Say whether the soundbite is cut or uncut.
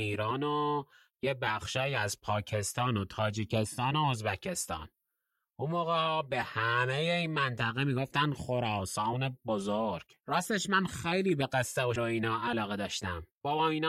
cut